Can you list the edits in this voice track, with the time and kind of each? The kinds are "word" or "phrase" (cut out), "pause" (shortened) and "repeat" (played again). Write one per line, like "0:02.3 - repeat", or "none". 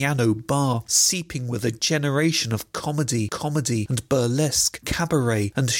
0:03.3 - repeat